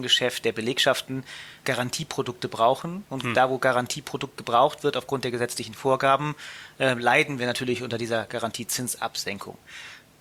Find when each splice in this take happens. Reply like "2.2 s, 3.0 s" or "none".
1.6 s